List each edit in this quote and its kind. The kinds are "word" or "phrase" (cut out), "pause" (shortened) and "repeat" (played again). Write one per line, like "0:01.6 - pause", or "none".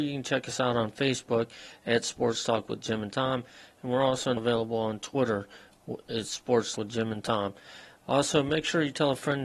0:04.4 - word
0:06.7 - word

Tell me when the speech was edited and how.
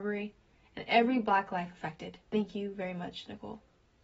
0:02.2 - pause

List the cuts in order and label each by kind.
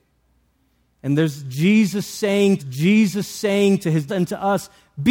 0:02.6 - repeat
0:04.1 - word

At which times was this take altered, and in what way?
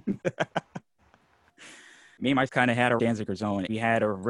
0:02.5 - word
0:03.0 - word

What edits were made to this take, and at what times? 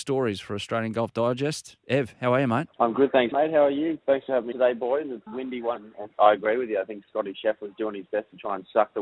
0:02.7 - pause
0:03.3 - word
0:04.5 - word
0:05.3 - word
0:05.8 - phrase
0:06.1 - word

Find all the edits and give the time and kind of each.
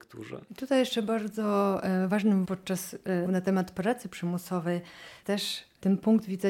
0:02.4 - word
0:03.3 - word
0:05.2 - word

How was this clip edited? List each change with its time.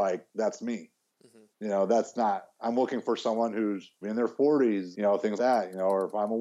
0:01.5 - pause
0:04.0 - word
0:04.9 - word
0:05.4 - word

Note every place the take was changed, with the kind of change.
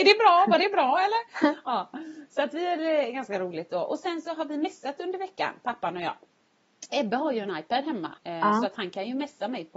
0:08.2 - pause

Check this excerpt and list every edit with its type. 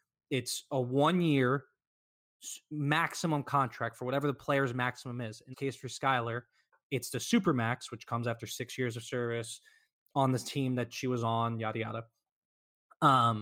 0:05.5 - word

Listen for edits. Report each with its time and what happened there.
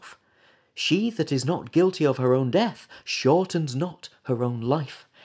none

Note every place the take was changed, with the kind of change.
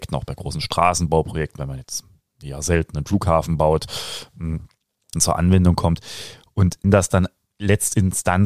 0:01.6 - word
0:05.1 - word
0:06.8 - word

